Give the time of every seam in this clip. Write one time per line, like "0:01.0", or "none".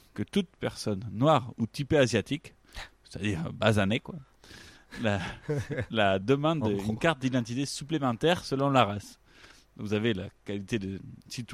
none